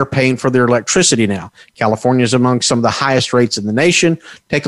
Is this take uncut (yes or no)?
yes